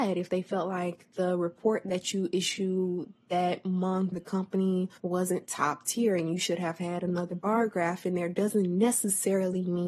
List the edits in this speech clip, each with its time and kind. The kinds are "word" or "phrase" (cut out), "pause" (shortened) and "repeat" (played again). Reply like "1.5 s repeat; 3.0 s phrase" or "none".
4.1 s word; 5.0 s pause